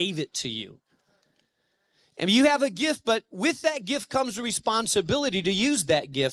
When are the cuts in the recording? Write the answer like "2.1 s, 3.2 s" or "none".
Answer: none